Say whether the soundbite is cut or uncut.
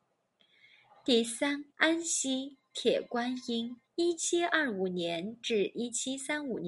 cut